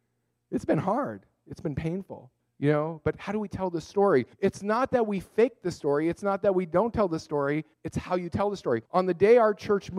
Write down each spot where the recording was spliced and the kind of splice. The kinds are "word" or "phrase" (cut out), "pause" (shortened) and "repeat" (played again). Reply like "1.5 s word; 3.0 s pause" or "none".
2.4 s pause; 4.3 s pause; 7.7 s pause; 8.9 s pause

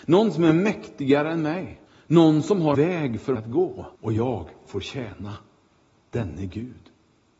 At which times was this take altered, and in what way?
1.9 s pause; 2.7 s word; 3.3 s word; 3.9 s pause

